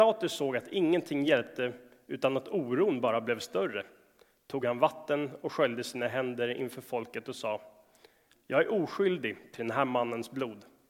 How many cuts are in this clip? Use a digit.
0